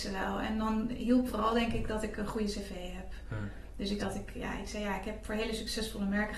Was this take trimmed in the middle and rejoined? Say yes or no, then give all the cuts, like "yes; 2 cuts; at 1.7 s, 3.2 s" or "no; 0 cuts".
yes; 2 cuts; at 1.3 s, 4.0 s